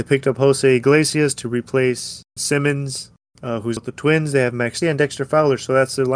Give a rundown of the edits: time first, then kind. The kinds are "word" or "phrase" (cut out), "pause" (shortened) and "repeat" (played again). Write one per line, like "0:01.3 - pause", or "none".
0:02.4 - word
0:03.8 - word
0:04.8 - word